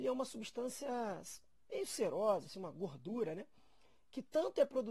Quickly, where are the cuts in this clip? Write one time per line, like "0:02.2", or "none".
none